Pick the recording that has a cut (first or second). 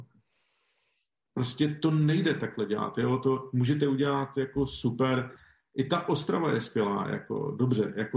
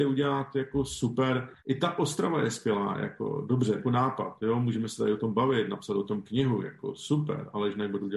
second